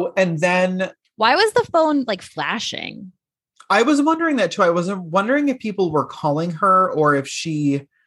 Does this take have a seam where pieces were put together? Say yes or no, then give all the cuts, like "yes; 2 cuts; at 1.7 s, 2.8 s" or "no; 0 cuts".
no; 0 cuts